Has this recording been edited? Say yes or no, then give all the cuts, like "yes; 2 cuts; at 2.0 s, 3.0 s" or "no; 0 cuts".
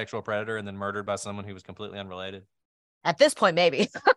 no; 0 cuts